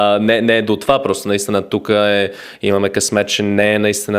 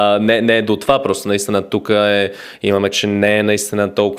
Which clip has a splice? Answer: second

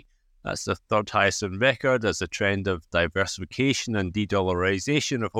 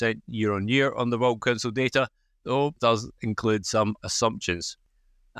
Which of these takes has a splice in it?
second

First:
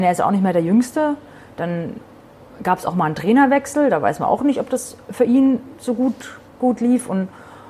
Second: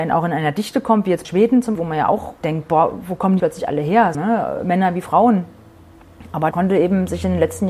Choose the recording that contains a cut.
second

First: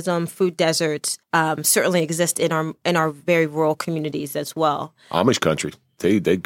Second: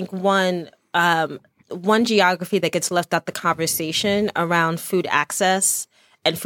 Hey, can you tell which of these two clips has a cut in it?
first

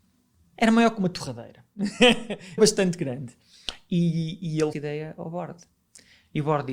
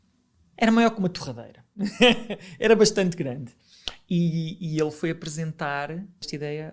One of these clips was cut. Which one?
first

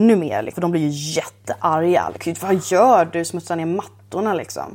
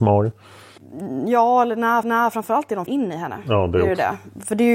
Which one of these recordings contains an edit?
second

